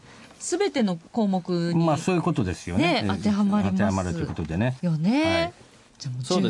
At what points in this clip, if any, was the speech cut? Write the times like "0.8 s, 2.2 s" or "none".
1.1 s, 4.8 s